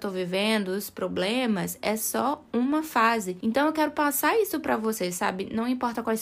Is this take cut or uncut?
uncut